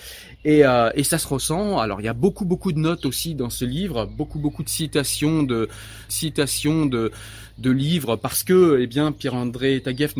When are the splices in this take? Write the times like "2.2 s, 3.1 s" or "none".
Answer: 6.1 s

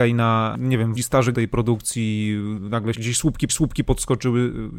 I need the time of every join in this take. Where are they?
1.0 s, 1.3 s, 2.9 s, 3.5 s

